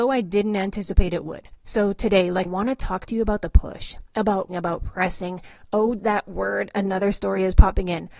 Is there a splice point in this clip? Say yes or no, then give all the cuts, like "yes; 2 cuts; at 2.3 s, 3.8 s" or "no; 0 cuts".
yes; 3 cuts; at 2.4 s, 4.5 s, 6.0 s